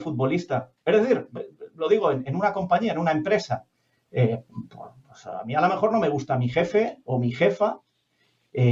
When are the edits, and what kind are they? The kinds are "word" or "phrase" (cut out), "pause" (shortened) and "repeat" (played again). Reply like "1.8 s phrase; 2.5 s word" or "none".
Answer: none